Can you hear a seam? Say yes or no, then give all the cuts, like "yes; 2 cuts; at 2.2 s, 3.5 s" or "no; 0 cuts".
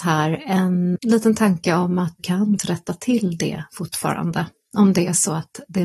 yes; 3 cuts; at 1.0 s, 2.2 s, 2.6 s